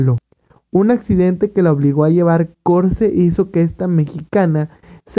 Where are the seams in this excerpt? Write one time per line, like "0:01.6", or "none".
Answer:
none